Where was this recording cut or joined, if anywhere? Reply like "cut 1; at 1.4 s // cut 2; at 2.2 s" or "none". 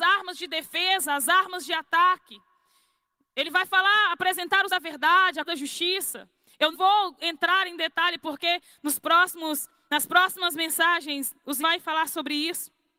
cut 1; at 4.7 s // cut 2; at 5.4 s // cut 3; at 6.7 s // cut 4; at 11.6 s